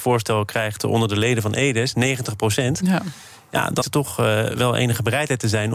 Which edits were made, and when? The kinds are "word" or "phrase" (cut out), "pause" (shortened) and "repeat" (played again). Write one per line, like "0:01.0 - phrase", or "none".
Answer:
0:03.8 - word